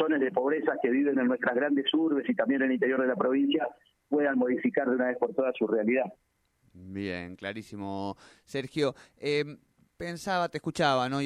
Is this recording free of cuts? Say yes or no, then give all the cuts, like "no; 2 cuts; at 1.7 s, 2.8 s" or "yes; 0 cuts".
yes; 0 cuts